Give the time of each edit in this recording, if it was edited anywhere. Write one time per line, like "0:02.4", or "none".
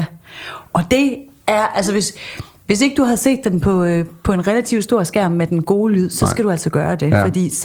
none